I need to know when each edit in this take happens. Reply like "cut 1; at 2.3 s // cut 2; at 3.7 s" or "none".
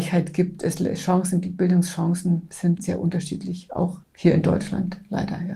cut 1; at 2.8 s // cut 2; at 4.0 s

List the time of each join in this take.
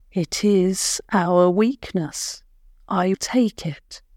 cut 1; at 3.1 s

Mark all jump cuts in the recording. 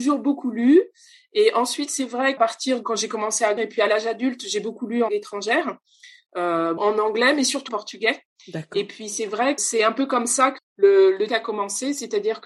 cut 1; at 2.4 s // cut 2; at 2.8 s // cut 3; at 3.6 s // cut 4; at 5.1 s // cut 5; at 6.8 s // cut 6; at 7.7 s // cut 7; at 9.6 s // cut 8; at 10.6 s // cut 9; at 11.3 s

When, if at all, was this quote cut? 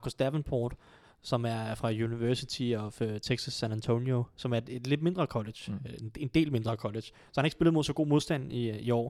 none

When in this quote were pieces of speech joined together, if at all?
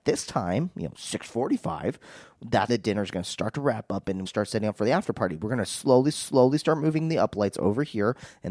cut 1; at 2.7 s // cut 2; at 4.3 s // cut 3; at 6.1 s

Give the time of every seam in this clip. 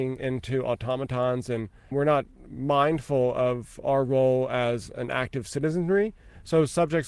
none

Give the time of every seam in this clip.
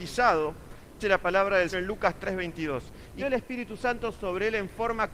cut 1; at 1.0 s // cut 2; at 1.7 s // cut 3; at 3.2 s

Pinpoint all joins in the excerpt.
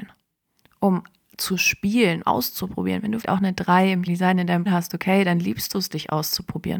cut 1; at 2.2 s // cut 2; at 3.2 s // cut 3; at 4.1 s // cut 4; at 4.7 s

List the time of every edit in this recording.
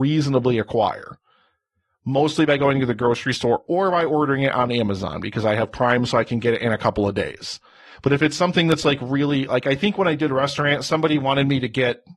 none

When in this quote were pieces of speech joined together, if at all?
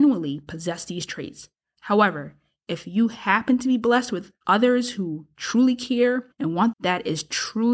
cut 1; at 4.4 s // cut 2; at 6.3 s // cut 3; at 6.7 s

